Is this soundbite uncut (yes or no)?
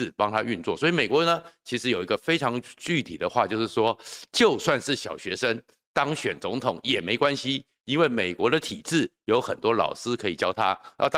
yes